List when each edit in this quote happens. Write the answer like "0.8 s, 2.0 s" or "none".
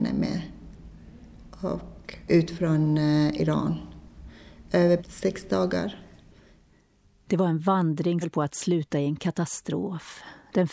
2.3 s, 5.0 s, 8.2 s